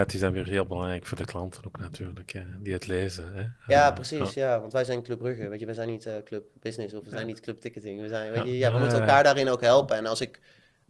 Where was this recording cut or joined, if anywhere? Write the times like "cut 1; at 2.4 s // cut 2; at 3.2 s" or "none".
none